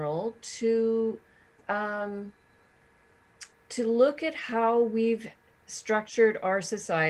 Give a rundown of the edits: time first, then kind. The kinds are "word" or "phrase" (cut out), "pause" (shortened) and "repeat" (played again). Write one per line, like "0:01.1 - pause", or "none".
none